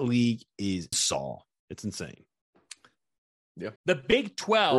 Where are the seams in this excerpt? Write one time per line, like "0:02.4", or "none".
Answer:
0:00.9
0:03.8